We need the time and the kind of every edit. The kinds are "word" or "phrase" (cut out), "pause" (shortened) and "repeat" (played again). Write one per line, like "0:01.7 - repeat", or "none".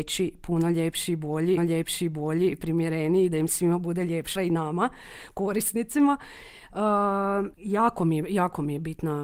0:01.6 - repeat
0:04.4 - word
0:07.5 - pause